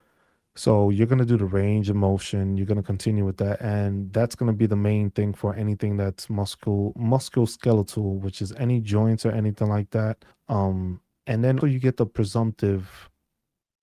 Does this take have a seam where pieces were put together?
yes; 2 cuts; at 10.3 s, 11.6 s

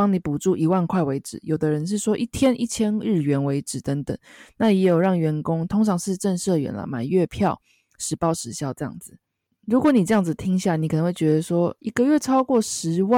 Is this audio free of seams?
no; 1 cut; at 11.8 s

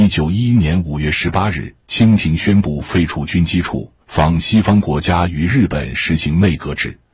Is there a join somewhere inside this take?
yes; 1 cut; at 4.0 s

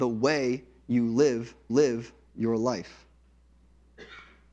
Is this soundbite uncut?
no; 1 cut; at 1.7 s

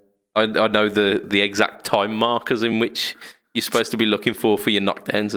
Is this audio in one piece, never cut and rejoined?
yes; 0 cuts

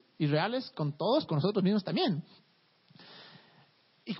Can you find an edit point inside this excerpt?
yes; 1 cut; at 1.3 s

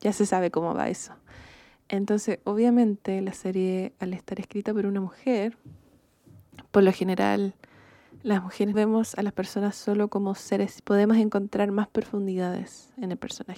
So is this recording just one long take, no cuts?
no; 2 cuts; at 8.7 s, 10.8 s

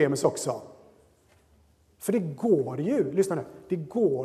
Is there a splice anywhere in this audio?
no; 0 cuts

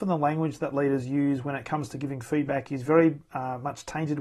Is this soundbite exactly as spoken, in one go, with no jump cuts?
yes; 0 cuts

